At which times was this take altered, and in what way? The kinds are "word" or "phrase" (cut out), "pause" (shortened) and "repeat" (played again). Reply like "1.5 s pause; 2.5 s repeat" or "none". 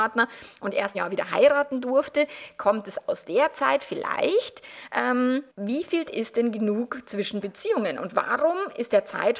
0.9 s phrase; 5.5 s pause; 6.1 s word; 7.4 s word